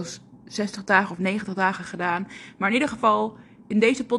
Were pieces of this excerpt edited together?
no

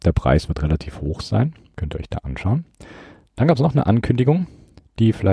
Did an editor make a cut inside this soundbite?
no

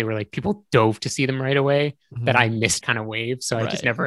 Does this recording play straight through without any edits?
no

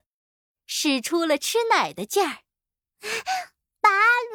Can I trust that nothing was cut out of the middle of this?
yes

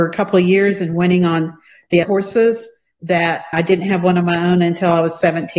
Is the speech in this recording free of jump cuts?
no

